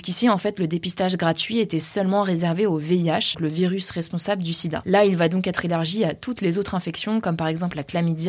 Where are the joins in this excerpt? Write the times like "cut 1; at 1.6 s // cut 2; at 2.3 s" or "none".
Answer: cut 1; at 3.3 s